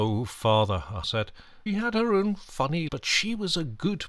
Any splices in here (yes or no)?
yes